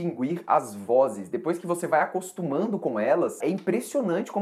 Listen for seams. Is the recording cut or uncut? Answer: cut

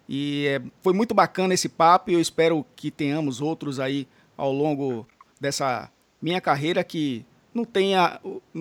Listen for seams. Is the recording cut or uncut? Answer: uncut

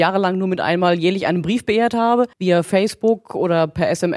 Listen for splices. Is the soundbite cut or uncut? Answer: cut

